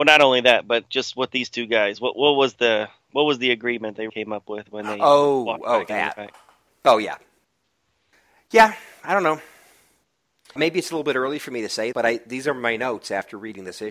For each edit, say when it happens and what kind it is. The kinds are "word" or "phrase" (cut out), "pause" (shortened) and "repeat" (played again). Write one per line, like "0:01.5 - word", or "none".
0:04.1 - word
0:10.6 - word
0:11.9 - word